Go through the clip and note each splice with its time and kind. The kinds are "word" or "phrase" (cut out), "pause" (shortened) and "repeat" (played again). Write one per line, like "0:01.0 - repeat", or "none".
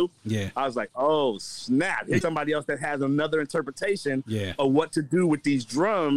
0:02.2 - word